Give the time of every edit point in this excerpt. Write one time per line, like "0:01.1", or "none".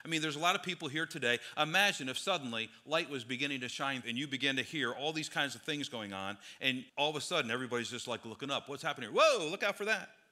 0:04.0
0:06.9